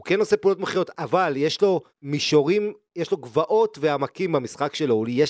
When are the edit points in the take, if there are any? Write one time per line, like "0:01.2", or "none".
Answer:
0:01.9